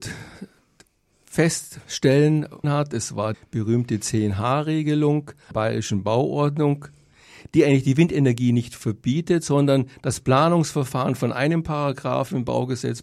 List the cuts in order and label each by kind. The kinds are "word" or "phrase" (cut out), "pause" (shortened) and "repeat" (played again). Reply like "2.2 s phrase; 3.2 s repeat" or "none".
2.6 s phrase; 3.3 s word; 5.5 s phrase

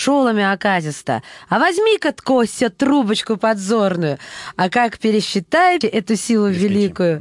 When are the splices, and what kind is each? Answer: 5.8 s word

